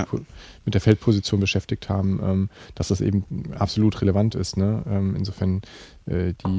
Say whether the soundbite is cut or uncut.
uncut